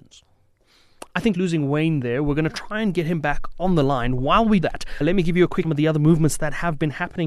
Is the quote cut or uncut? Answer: cut